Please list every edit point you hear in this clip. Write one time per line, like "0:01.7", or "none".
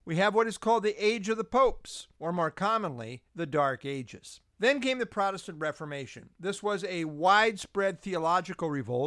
0:02.1
0:03.3
0:04.5
0:06.3